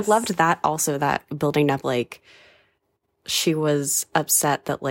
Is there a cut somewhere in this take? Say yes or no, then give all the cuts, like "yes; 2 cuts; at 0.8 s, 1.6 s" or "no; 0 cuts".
yes; 2 cuts; at 1.3 s, 1.8 s